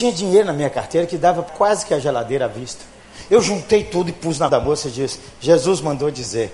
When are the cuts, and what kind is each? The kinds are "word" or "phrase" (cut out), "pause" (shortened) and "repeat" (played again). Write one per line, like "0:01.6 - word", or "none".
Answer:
0:01.5 - word
0:04.5 - word